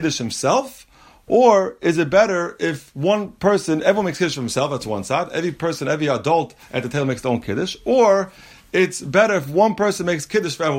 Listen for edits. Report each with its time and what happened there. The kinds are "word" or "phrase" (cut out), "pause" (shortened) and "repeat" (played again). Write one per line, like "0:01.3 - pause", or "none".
none